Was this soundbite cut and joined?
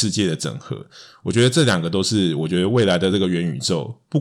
no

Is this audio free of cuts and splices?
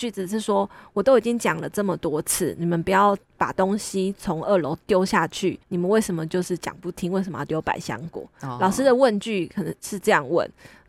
no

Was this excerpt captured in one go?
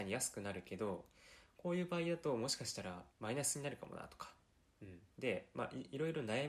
no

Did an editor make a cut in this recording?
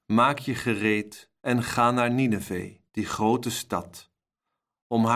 yes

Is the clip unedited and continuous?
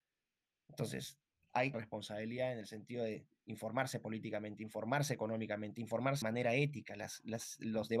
no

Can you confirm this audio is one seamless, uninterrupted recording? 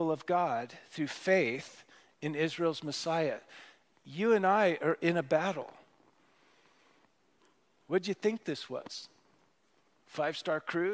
yes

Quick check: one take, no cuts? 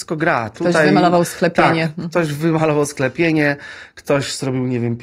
yes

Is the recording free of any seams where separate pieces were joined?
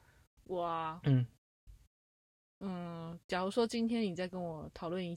yes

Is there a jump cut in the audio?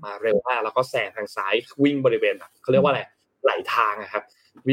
no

